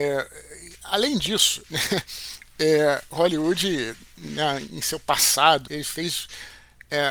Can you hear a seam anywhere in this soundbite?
yes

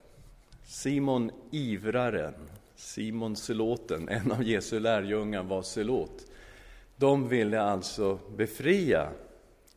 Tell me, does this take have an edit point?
no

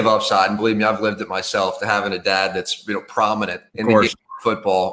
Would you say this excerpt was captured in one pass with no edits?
no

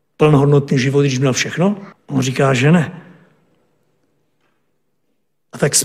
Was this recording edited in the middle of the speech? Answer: yes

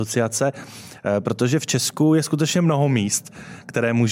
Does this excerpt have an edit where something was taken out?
no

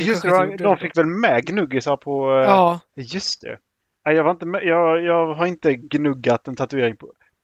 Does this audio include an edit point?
yes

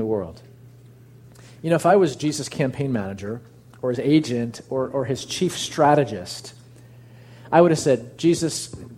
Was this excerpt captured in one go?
yes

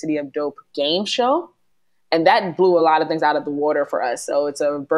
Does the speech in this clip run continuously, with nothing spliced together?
yes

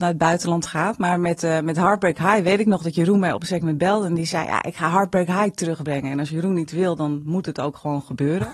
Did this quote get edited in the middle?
no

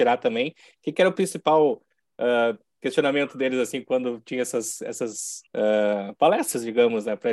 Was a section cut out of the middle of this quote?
yes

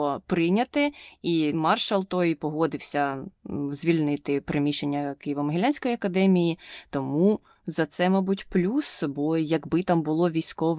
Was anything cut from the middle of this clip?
no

